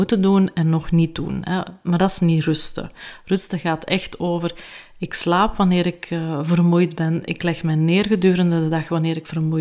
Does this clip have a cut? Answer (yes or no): no